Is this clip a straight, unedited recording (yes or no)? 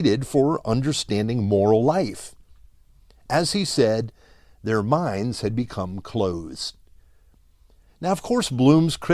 yes